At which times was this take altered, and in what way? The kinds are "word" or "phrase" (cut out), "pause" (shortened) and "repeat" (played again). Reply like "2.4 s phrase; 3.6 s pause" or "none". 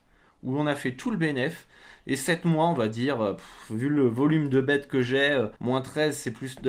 5.6 s pause